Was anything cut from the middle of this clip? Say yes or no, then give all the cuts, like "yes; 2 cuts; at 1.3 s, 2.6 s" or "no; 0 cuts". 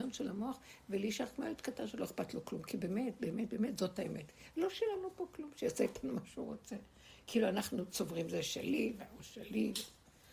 no; 0 cuts